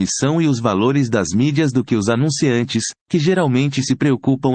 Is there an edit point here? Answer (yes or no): no